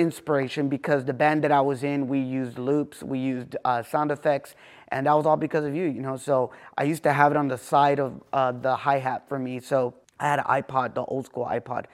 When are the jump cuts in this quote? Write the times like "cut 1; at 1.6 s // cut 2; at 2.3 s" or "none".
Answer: none